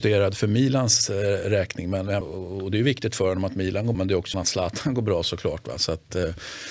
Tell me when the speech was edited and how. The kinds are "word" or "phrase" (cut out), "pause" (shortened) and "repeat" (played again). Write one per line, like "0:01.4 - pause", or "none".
0:02.2 - word
0:03.9 - word
0:04.3 - phrase